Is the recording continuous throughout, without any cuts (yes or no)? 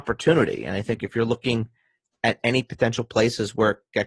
yes